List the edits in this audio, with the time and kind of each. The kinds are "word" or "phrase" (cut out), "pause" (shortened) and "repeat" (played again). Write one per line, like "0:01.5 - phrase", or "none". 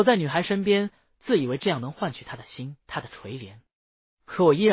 0:02.8 - pause